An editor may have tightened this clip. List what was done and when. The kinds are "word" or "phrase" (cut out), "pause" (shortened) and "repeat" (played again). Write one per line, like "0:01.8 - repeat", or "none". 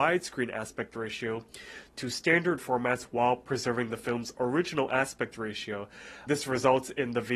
0:02.6 - phrase
0:06.3 - word